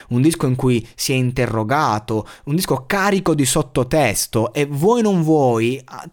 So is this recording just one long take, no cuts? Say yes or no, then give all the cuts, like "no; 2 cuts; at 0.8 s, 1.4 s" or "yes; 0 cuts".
yes; 0 cuts